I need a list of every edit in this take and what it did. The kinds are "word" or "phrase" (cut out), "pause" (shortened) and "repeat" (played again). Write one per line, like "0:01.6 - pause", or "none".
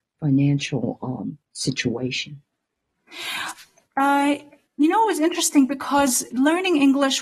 0:01.5 - pause
0:06.3 - word

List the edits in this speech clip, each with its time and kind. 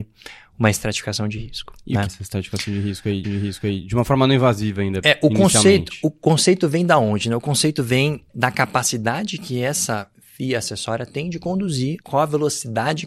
0:02.1 - phrase
0:03.2 - repeat
0:08.3 - word
0:12.0 - pause

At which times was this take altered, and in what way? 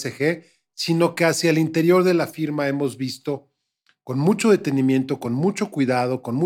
none

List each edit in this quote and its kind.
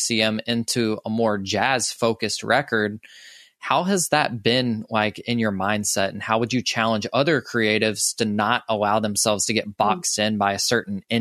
none

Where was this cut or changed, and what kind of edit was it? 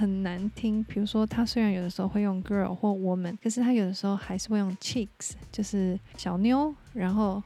none

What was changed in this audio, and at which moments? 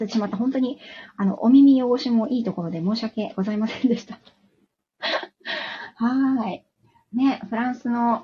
none

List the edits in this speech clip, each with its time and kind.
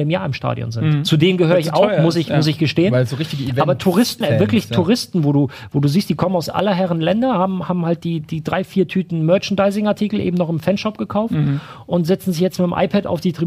0:04.2 - word

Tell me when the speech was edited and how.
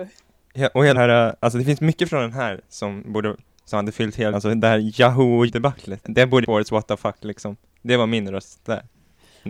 0:01.0 - word
0:04.3 - word
0:05.5 - word
0:06.0 - word
0:06.4 - word

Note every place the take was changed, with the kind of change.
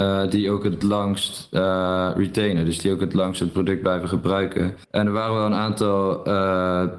0:04.8 - pause

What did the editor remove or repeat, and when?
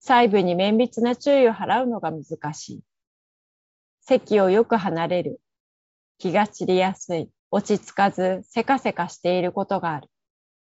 0:07.4 - pause

